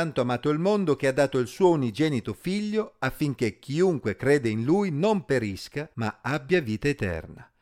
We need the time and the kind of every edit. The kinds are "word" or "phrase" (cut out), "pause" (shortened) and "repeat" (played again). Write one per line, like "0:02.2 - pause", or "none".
0:05.9 - pause